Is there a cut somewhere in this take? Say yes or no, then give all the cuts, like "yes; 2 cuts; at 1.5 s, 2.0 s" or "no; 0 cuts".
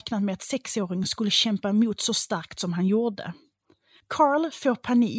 no; 0 cuts